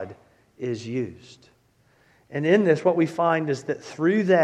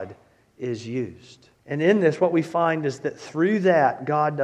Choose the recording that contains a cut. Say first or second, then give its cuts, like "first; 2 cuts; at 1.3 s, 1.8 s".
second; 1 cut; at 1.6 s